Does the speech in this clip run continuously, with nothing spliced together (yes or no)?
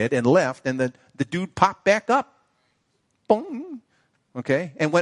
yes